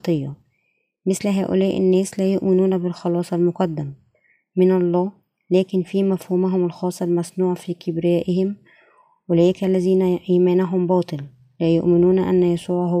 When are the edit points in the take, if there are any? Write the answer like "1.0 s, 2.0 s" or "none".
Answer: none